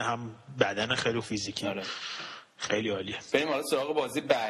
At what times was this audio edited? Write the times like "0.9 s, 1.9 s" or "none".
1.2 s

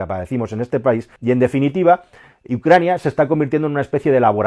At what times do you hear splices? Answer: 1.2 s

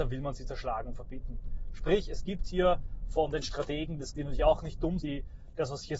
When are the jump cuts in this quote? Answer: 4.1 s, 5.0 s

